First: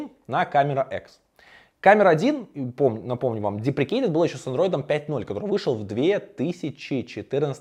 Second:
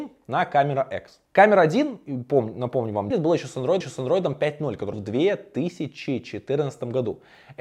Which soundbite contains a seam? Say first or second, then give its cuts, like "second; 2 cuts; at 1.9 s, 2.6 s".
second; 4 cuts; at 1.2 s, 3.1 s, 3.8 s, 4.9 s